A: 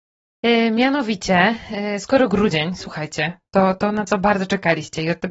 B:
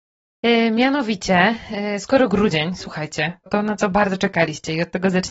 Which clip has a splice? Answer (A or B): B